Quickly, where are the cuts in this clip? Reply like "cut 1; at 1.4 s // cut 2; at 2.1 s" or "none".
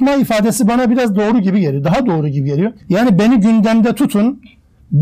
cut 1; at 2.8 s